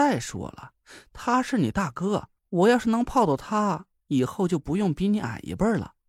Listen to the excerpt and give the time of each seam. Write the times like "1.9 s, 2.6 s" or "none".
2.4 s